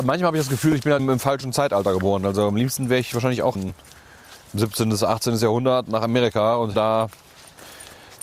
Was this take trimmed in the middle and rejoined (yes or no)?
yes